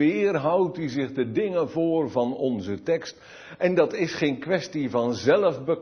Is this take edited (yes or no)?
no